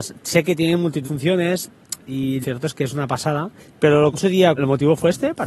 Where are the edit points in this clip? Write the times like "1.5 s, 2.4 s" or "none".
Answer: 1.0 s, 2.4 s, 3.6 s, 4.1 s, 4.6 s